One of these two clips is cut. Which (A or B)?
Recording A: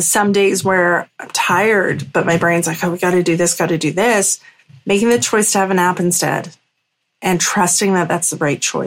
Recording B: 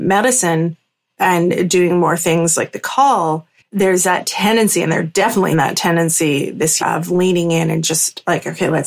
B